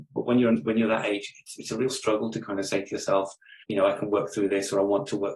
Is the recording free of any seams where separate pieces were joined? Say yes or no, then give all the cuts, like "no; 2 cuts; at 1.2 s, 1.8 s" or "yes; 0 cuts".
no; 2 cuts; at 1.6 s, 3.6 s